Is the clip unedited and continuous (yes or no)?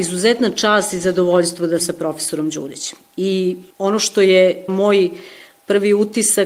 no